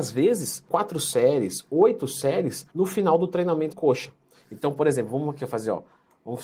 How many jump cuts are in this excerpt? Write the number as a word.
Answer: two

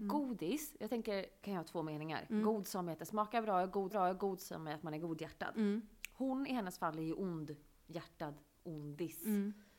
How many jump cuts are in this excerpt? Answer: two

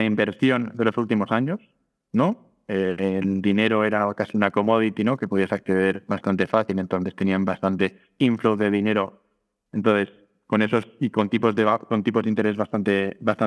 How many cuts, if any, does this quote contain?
zero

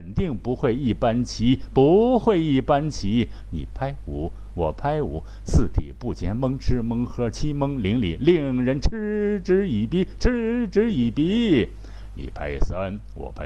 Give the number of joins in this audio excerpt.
zero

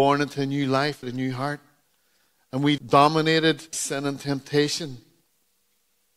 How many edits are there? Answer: three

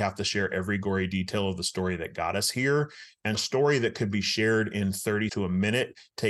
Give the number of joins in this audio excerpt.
two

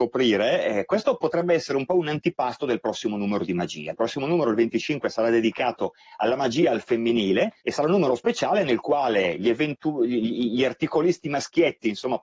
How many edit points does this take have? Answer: one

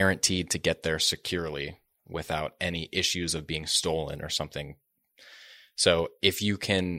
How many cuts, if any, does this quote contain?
zero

